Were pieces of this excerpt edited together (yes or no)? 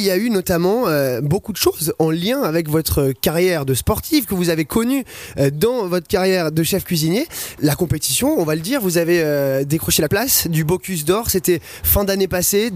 yes